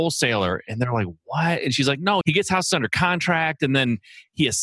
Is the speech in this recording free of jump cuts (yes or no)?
no